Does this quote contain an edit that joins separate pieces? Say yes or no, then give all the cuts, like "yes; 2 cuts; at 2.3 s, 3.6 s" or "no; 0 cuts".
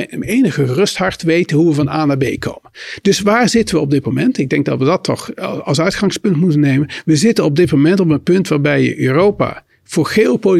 no; 0 cuts